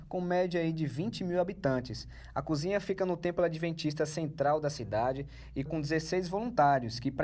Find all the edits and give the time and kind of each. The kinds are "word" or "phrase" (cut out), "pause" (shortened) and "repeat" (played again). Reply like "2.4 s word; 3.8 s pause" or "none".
5.7 s word